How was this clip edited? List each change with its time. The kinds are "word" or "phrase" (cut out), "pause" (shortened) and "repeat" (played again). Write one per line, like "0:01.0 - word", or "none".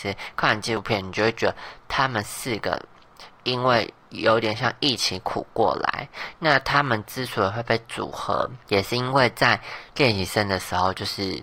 0:08.6 - pause